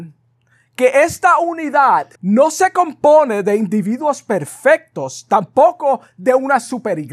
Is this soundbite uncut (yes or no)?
no